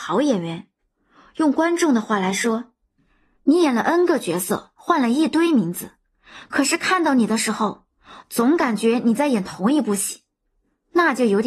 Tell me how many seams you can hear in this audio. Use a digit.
0